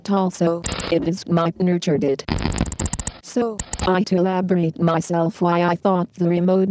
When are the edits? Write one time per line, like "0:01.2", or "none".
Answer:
0:01.2
0:01.5
0:04.0